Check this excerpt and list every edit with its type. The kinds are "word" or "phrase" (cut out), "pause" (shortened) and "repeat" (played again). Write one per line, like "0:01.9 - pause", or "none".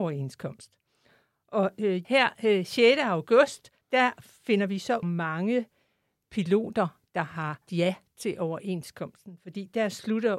0:02.0 - word
0:03.8 - pause
0:05.0 - phrase
0:07.7 - word